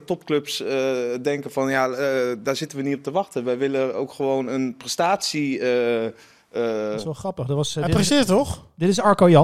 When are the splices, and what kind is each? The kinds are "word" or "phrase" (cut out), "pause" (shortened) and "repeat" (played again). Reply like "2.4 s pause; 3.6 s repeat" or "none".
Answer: none